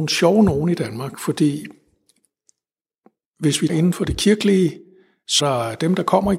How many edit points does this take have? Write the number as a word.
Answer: two